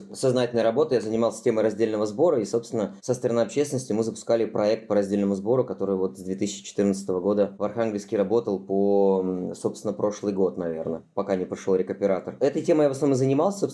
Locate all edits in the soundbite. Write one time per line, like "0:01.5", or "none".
none